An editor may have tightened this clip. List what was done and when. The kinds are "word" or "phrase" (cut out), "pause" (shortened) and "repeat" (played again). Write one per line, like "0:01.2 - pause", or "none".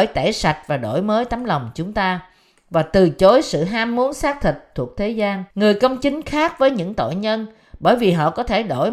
0:05.5 - pause

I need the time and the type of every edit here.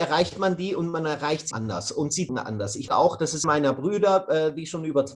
0:01.5 - word
0:02.3 - word
0:02.9 - word
0:03.4 - phrase

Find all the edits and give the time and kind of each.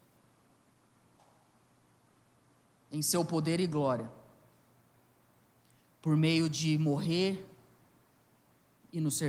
none

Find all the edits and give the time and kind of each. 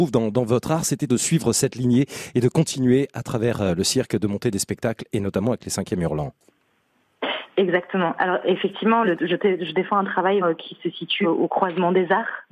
0:01.1 - word
0:09.0 - word
0:10.4 - word
0:11.2 - word

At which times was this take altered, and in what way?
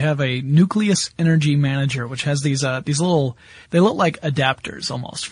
0:03.6 - pause

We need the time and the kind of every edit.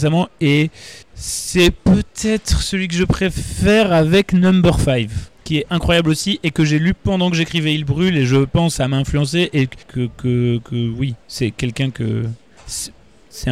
0:01.0 - pause
0:05.3 - pause
0:09.8 - pause

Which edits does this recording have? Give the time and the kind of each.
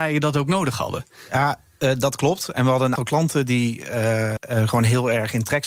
0:03.0 - word
0:04.4 - word

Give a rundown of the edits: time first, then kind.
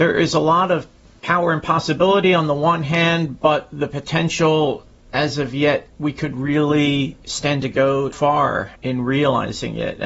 none

